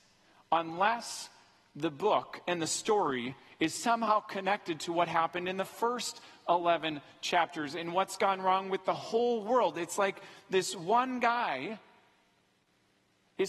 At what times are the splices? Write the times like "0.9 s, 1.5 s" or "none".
none